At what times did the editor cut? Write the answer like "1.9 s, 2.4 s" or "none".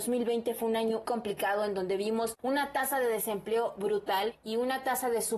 1.0 s